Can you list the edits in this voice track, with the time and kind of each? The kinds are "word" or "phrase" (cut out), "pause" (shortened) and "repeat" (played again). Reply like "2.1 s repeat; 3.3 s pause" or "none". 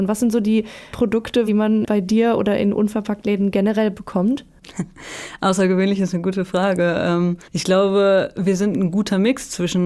0.9 s word; 1.5 s phrase; 7.4 s pause